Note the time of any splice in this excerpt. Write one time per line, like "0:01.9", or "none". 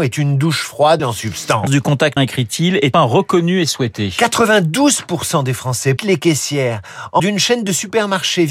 0:01.0
0:01.7
0:02.2
0:02.9
0:06.0
0:07.2